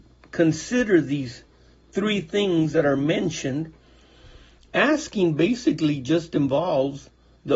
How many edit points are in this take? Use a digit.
0